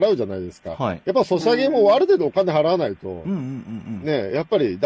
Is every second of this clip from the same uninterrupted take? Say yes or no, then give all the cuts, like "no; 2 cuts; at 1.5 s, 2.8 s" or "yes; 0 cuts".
yes; 0 cuts